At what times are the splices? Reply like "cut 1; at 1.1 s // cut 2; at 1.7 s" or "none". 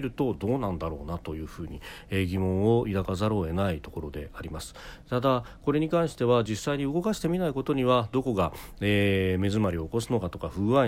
none